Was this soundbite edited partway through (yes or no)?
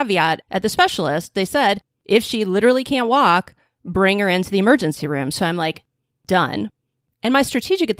no